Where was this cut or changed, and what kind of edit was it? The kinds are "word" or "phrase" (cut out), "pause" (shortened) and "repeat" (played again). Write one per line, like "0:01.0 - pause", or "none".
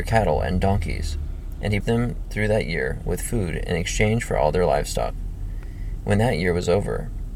0:01.8 - word